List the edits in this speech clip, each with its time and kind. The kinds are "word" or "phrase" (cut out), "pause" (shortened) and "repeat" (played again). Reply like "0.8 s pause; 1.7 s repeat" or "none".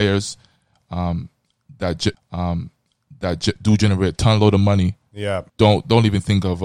2.1 s repeat; 5.5 s pause